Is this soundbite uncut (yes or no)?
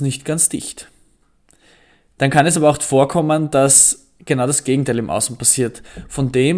yes